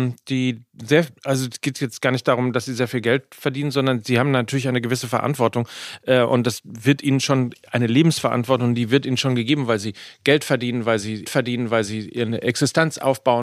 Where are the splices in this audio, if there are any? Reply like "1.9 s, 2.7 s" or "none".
1.2 s, 11.2 s